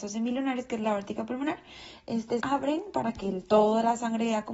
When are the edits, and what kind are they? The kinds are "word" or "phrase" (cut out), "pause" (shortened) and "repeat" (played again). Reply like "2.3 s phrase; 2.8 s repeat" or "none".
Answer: 2.4 s word